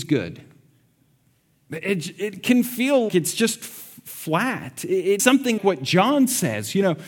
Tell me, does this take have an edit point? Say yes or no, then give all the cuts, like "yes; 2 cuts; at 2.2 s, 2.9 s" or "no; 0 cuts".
yes; 3 cuts; at 3.1 s, 5.2 s, 5.6 s